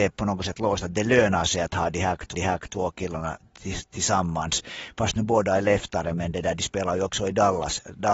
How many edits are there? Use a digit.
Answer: 1